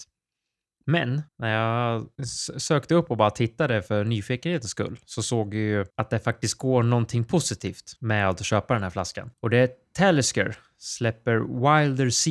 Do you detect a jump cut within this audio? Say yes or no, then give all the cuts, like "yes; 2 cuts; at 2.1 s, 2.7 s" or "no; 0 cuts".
yes; 5 cuts; at 1.3 s, 2.2 s, 5.9 s, 8.0 s, 9.3 s